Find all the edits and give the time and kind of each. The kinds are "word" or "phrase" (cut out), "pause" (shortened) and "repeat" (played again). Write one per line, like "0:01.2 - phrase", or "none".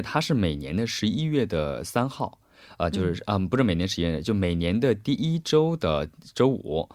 none